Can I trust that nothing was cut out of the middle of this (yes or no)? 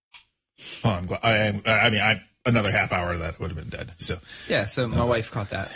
yes